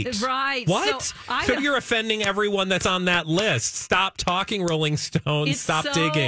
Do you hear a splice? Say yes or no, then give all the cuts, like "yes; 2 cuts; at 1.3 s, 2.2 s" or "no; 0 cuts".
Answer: yes; 1 cut; at 1.6 s